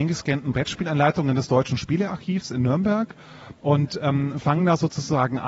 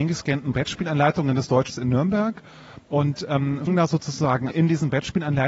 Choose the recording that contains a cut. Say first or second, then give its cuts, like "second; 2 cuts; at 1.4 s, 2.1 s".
second; 3 cuts; at 1.7 s, 3.7 s, 4.5 s